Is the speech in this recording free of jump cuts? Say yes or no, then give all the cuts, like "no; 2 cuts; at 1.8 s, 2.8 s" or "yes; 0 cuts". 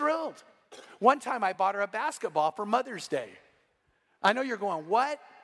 yes; 0 cuts